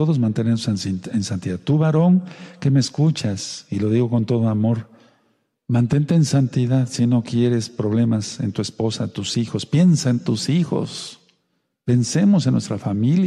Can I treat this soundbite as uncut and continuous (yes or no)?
yes